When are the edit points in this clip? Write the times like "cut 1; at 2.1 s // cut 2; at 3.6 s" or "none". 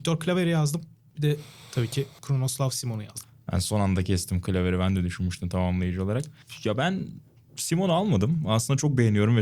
none